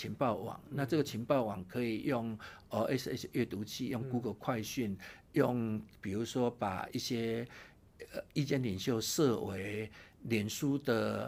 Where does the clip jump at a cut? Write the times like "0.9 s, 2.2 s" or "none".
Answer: none